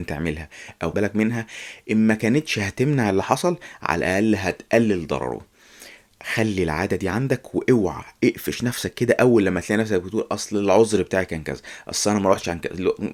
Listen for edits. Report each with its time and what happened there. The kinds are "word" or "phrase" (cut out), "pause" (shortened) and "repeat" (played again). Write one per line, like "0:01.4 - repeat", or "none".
0:00.9 - phrase